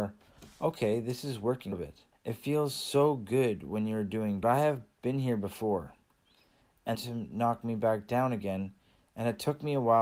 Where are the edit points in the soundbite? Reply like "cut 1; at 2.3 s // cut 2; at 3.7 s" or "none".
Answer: cut 1; at 1.7 s // cut 2; at 2.1 s // cut 3; at 4.4 s // cut 4; at 6.9 s